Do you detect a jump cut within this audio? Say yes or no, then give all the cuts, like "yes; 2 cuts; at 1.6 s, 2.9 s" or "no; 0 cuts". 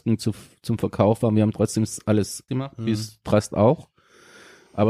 yes; 1 cut; at 2.5 s